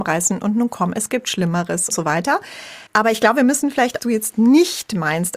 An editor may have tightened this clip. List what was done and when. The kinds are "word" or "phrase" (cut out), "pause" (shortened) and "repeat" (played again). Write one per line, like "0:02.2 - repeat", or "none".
0:01.9 - word
0:02.9 - pause
0:04.0 - phrase